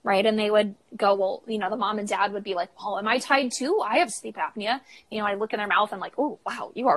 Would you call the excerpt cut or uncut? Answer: uncut